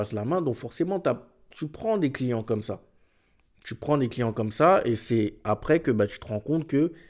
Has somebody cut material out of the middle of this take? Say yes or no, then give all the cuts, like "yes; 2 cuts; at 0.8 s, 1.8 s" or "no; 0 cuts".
no; 0 cuts